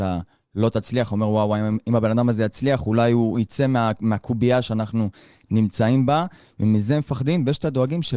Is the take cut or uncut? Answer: uncut